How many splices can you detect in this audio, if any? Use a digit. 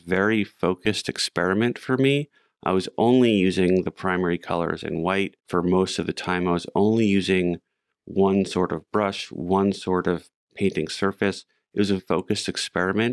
2